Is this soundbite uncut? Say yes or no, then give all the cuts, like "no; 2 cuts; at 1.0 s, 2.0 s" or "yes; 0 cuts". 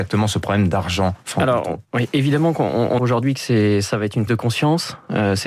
no; 2 cuts; at 3.0 s, 4.3 s